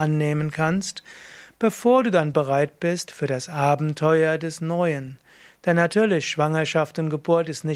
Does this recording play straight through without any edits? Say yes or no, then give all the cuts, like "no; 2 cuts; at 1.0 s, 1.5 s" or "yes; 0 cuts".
yes; 0 cuts